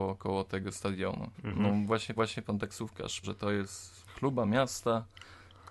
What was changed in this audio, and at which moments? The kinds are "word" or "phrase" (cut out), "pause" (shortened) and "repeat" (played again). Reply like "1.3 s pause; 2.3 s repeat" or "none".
1.3 s pause; 2.2 s repeat; 3.2 s word; 4.1 s word